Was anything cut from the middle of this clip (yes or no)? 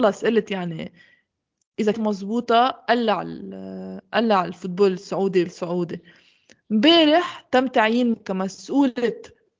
yes